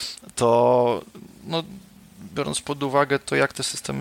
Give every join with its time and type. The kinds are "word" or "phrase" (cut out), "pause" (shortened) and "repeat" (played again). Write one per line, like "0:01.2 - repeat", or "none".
none